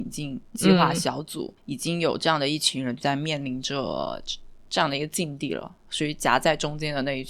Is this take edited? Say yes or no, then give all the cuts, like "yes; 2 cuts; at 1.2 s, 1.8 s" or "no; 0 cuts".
yes; 1 cut; at 1.6 s